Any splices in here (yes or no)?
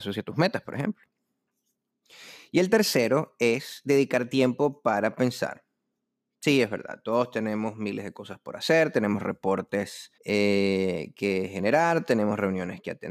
yes